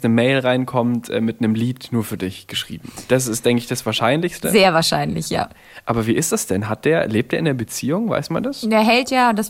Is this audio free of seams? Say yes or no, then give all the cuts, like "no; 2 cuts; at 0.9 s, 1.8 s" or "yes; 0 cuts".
yes; 0 cuts